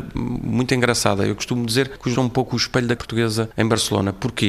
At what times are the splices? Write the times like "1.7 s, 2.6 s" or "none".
2.1 s, 3.0 s

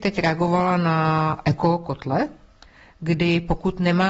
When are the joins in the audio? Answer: none

